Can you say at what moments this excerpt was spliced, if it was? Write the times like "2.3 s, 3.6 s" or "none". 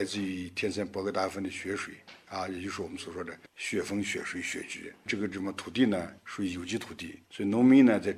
3.5 s, 5.1 s, 6.2 s, 7.2 s